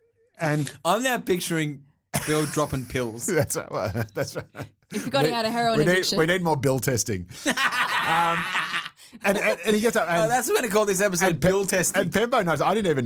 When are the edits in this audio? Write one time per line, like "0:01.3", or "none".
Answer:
none